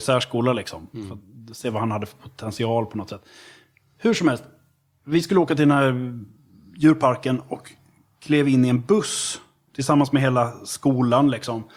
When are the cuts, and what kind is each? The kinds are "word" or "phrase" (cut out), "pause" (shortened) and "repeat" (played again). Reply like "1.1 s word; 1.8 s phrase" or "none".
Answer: none